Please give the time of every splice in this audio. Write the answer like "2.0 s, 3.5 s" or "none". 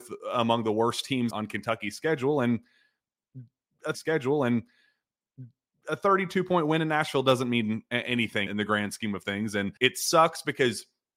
1.3 s, 3.9 s, 8.5 s, 9.8 s